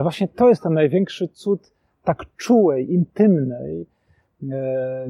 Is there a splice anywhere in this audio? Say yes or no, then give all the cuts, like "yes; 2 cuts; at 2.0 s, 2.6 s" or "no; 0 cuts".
no; 0 cuts